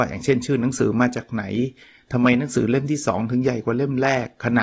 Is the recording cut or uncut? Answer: uncut